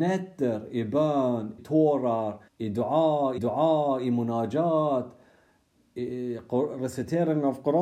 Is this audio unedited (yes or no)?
no